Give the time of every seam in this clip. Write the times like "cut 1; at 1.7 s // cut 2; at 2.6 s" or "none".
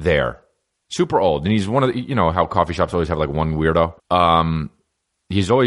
cut 1; at 4.0 s